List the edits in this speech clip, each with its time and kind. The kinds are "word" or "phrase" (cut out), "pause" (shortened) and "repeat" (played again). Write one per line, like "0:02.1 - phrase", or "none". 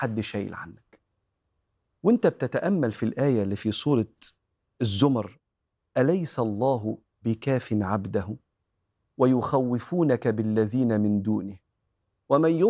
none